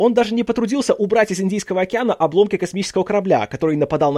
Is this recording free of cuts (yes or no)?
yes